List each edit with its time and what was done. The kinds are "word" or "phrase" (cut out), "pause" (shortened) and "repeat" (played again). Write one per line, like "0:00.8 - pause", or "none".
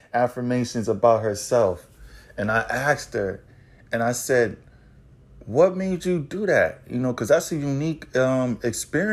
none